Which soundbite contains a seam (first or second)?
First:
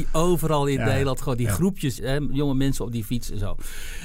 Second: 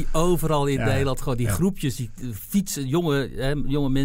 first